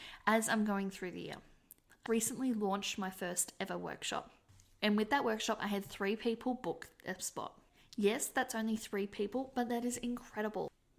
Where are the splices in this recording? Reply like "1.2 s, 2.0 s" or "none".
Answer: 2.1 s